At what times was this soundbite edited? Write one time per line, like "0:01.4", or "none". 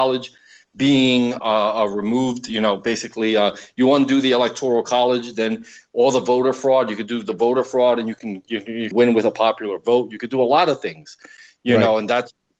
0:01.4
0:08.9